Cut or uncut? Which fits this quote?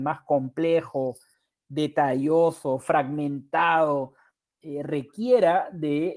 uncut